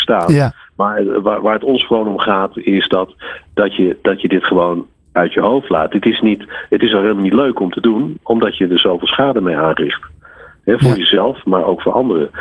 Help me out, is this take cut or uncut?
uncut